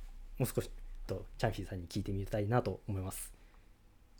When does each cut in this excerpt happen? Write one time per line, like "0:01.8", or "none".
0:01.1